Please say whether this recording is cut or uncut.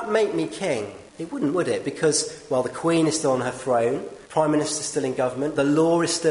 cut